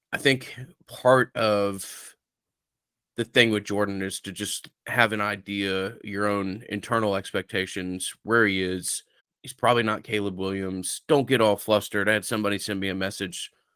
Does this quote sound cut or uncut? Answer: cut